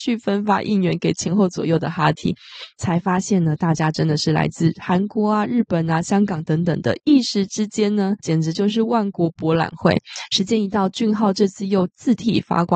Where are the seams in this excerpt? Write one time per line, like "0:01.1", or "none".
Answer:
0:08.2